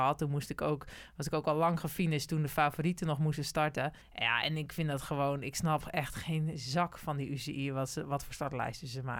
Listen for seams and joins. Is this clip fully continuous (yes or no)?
no